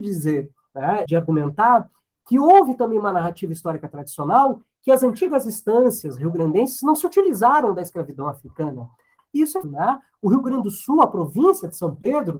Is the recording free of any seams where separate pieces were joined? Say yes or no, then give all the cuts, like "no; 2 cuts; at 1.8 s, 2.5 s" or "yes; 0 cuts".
no; 2 cuts; at 1.1 s, 9.6 s